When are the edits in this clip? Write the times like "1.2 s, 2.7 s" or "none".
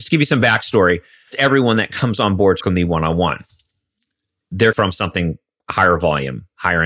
1.3 s, 2.6 s, 4.7 s